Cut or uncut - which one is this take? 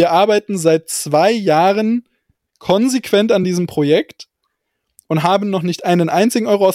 uncut